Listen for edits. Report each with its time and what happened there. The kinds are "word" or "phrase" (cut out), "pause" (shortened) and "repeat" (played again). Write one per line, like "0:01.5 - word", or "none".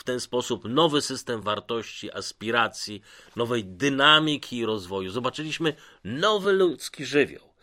none